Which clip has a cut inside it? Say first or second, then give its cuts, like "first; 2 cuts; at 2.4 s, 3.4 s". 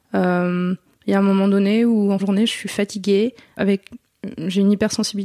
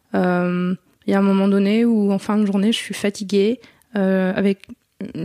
first; 2 cuts; at 2.2 s, 3.6 s